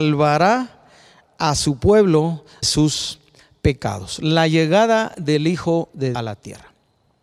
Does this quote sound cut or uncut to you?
cut